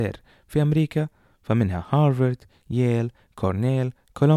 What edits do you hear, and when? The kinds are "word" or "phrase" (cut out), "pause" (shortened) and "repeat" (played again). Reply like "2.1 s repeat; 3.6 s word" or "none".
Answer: none